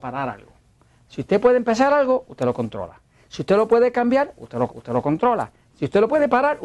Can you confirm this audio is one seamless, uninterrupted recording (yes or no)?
no